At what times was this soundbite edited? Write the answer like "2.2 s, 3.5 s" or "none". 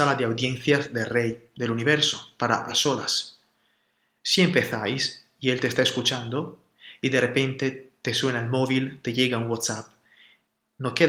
2.7 s

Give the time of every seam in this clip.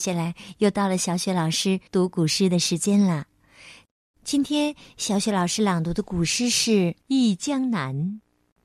1.9 s, 7.0 s

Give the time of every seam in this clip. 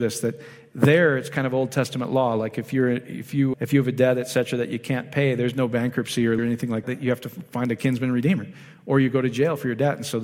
3.5 s, 6.4 s, 6.8 s

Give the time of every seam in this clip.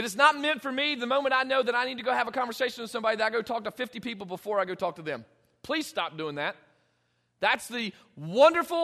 none

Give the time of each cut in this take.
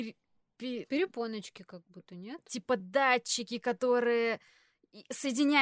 none

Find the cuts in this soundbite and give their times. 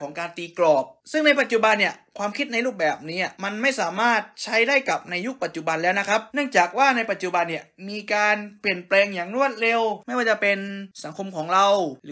3.3 s, 6.3 s

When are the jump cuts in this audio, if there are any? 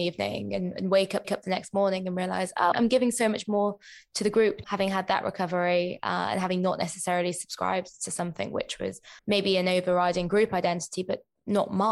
1.2 s, 2.7 s, 4.6 s, 9.2 s

